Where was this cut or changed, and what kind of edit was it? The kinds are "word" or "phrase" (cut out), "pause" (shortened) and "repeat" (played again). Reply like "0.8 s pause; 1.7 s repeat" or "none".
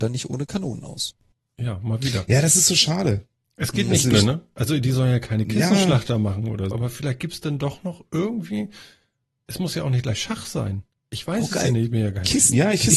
1.3 s pause; 4.1 s word; 6.7 s word